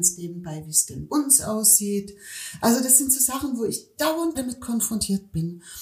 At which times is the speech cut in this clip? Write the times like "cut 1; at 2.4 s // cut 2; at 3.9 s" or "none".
cut 1; at 1.1 s // cut 2; at 4.3 s